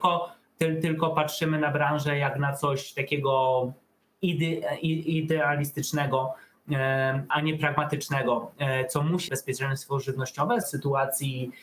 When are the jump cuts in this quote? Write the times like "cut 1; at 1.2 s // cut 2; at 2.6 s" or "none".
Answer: cut 1; at 7.3 s // cut 2; at 9.3 s // cut 3; at 10.6 s